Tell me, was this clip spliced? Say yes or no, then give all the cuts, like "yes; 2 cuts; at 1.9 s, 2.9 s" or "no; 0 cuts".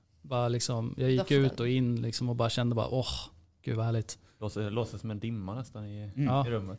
no; 0 cuts